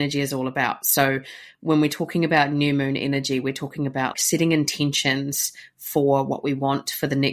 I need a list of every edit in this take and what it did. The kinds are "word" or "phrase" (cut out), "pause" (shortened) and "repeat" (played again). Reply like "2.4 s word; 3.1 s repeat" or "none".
4.1 s word